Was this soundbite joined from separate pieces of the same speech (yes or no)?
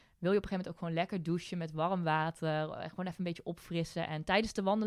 no